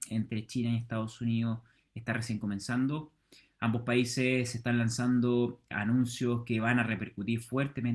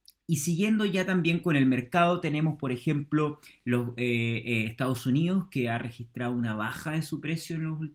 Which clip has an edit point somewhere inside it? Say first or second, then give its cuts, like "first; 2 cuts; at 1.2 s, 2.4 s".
first; 1 cut; at 5.7 s